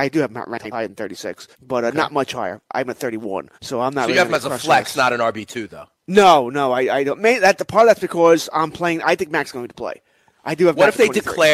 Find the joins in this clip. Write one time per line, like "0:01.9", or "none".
0:01.5
0:03.5
0:06.0